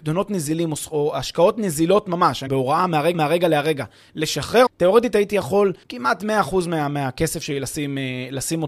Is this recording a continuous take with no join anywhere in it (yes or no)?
no